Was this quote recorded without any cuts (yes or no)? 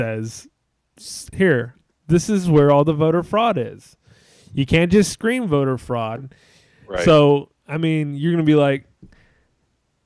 yes